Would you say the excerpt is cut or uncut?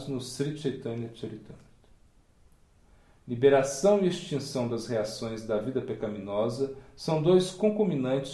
uncut